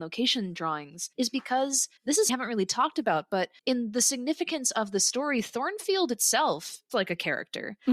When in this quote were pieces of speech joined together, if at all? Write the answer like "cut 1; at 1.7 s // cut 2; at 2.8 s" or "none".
cut 1; at 1.1 s // cut 2; at 2.0 s // cut 3; at 2.3 s // cut 4; at 3.6 s // cut 5; at 6.9 s